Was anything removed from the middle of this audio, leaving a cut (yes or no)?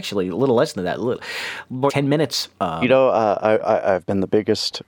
yes